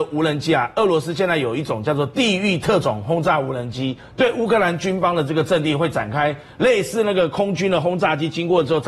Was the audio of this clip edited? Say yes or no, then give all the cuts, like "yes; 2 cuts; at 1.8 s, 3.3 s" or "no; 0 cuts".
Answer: no; 0 cuts